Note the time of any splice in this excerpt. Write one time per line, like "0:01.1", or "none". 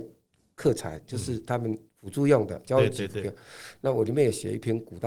0:01.9